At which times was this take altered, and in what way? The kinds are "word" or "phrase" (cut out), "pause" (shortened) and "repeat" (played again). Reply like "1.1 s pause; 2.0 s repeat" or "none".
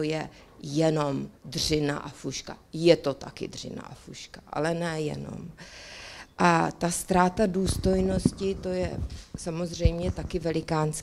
1.4 s pause